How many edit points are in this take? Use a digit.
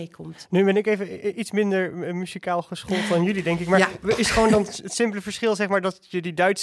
0